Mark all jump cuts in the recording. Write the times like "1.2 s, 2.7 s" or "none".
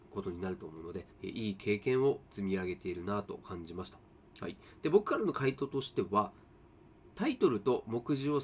1.1 s, 2.3 s, 7.1 s